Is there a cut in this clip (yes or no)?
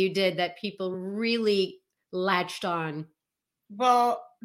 no